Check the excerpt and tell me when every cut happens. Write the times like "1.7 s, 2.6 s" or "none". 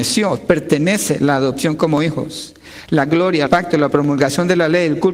3.5 s